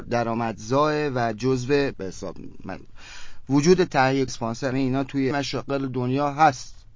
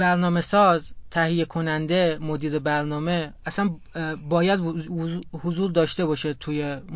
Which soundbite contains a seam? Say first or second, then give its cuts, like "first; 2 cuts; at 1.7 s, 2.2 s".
first; 4 cuts; at 1.9 s, 4.3 s, 4.7 s, 5.3 s